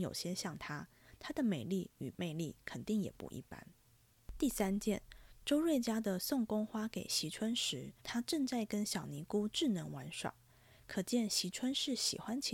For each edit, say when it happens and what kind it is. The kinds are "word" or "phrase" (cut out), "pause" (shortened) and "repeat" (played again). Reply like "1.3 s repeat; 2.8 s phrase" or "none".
8.0 s pause